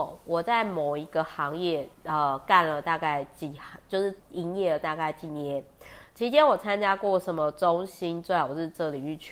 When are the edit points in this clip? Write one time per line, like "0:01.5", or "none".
0:01.9
0:04.2

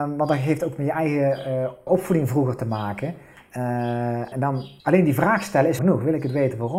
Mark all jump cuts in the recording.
0:01.9
0:04.3
0:04.8
0:05.8

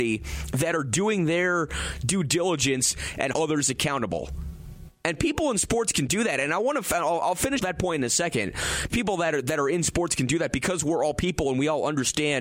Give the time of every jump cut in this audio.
0:03.3
0:07.6
0:08.9

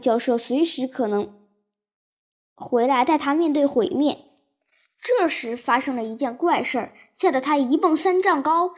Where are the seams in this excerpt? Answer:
none

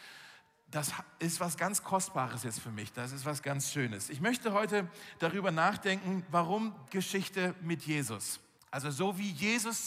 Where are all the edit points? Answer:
0:03.4
0:06.9
0:08.6

